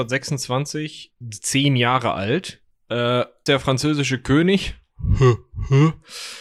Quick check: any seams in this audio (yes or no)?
yes